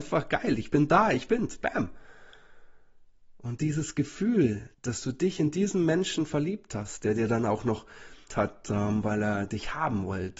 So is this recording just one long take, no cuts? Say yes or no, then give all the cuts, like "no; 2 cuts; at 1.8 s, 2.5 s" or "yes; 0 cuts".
no; 2 cuts; at 4.7 s, 8.3 s